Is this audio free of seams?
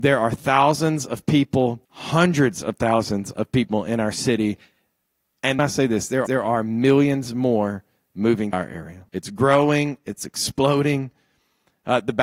no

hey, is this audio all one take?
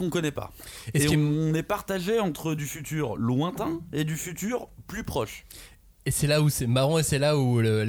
yes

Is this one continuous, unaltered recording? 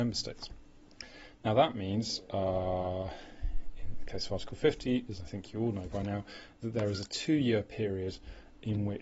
yes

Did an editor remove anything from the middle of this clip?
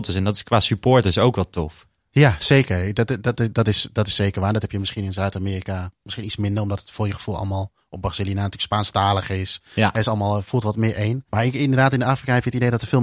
yes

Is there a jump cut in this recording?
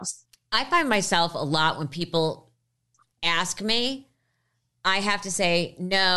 no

